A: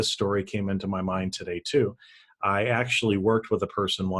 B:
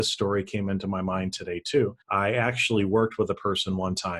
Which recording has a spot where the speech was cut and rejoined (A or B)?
B